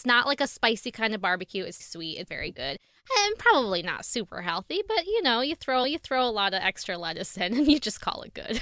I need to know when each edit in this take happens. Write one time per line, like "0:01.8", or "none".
0:01.8
0:02.3
0:05.8